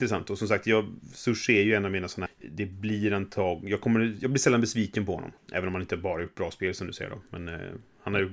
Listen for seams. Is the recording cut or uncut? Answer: cut